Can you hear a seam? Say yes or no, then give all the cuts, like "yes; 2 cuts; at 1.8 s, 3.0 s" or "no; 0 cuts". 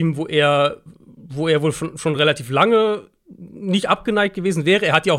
no; 0 cuts